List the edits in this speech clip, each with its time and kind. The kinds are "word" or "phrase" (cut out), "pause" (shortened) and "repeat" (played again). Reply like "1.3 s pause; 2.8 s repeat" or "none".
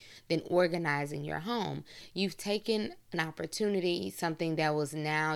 none